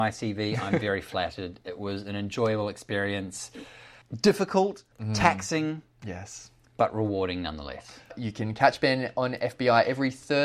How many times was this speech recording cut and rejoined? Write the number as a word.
one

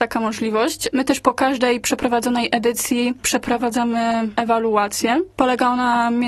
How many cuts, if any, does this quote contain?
zero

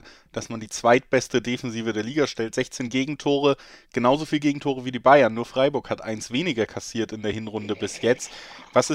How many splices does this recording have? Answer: zero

